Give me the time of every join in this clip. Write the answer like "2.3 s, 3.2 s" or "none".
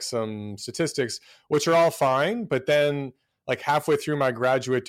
none